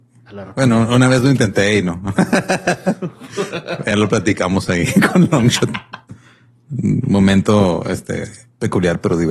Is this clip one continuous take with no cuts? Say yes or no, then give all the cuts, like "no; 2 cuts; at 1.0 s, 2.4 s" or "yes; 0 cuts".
yes; 0 cuts